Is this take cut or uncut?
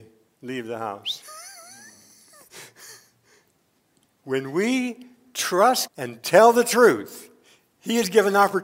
cut